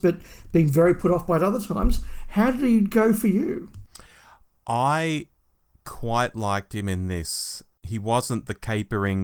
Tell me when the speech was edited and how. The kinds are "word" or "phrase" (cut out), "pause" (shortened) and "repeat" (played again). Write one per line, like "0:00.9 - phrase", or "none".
none